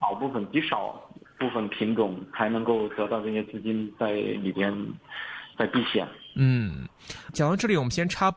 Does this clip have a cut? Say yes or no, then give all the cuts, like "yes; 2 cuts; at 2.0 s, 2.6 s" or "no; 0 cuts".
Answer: yes; 1 cut; at 7.3 s